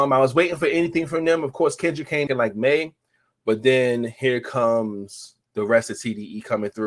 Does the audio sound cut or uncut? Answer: cut